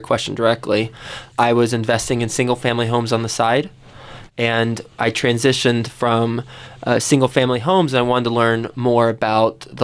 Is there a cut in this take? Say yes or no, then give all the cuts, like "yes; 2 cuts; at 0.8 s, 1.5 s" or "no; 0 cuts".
no; 0 cuts